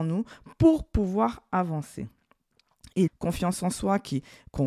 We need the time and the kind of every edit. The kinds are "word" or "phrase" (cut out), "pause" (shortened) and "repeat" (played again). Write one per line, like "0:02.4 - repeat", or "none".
0:03.1 - word

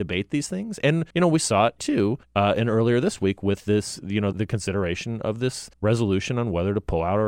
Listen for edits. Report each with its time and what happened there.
0:01.1 - pause
0:01.8 - word
0:02.2 - pause
0:04.3 - word
0:05.7 - pause

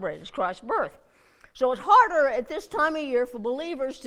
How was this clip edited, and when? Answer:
none

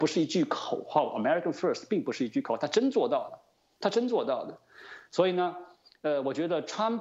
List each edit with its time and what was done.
none

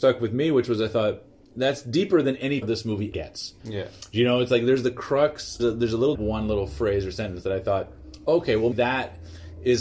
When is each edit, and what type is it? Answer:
0:01.5 - word
0:02.6 - word
0:03.1 - word
0:03.6 - pause
0:05.6 - word
0:06.1 - phrase
0:08.7 - word

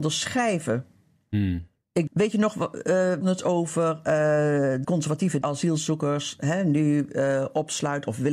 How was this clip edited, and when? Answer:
0:02.1 - word
0:03.2 - word
0:04.8 - word
0:05.4 - word

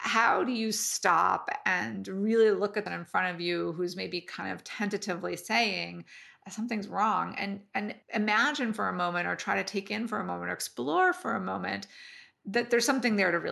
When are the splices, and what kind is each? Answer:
0:02.9 - phrase
0:08.0 - pause

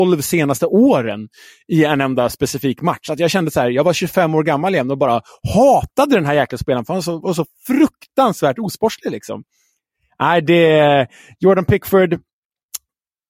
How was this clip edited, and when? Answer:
none

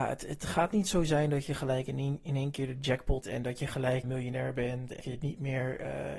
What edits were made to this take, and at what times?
0:03.2 - word
0:04.0 - word
0:05.0 - word

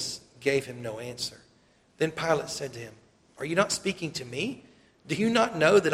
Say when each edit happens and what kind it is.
none

